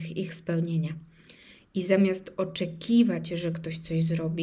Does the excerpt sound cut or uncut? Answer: uncut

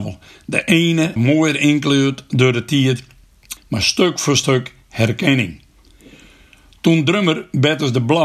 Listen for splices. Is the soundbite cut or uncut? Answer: cut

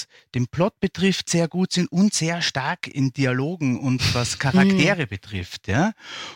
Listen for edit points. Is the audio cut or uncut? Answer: uncut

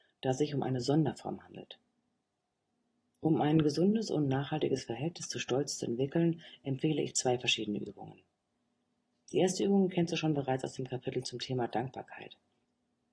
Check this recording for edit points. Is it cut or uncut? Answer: uncut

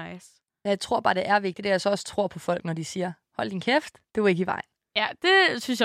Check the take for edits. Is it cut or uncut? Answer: cut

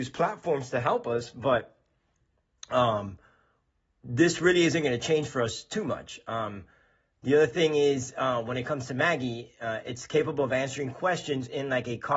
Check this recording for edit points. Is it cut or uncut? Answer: uncut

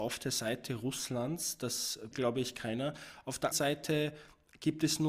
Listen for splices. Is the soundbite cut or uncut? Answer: cut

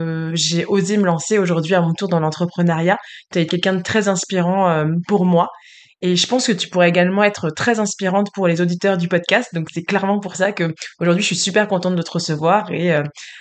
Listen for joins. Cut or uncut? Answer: cut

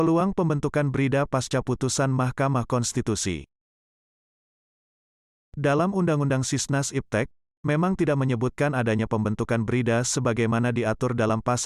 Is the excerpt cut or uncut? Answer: uncut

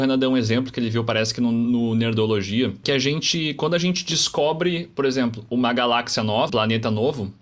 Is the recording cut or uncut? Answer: cut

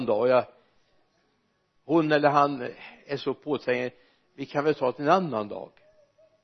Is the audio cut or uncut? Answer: uncut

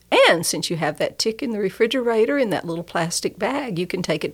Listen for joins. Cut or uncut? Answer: uncut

